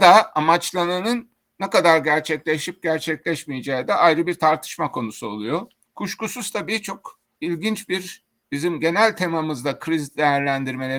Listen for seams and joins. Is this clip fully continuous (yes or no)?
yes